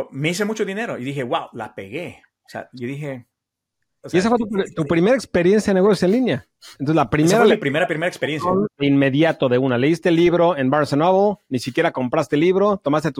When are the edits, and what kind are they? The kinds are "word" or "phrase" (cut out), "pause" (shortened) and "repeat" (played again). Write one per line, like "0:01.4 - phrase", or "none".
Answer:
none